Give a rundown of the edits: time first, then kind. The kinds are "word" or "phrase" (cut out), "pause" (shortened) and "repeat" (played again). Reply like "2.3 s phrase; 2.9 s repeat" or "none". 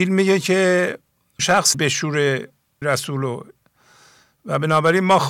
1.4 s word; 1.7 s word; 2.8 s word